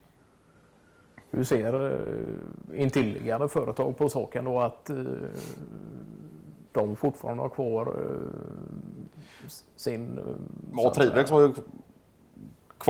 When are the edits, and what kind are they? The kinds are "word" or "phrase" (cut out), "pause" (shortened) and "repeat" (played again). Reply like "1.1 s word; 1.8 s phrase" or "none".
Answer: 1.2 s pause; 6.7 s pause